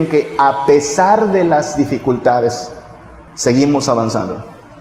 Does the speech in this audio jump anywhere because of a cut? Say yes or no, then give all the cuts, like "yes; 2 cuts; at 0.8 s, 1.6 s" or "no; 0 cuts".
yes; 1 cut; at 3.3 s